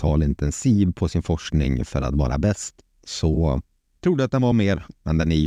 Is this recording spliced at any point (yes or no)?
no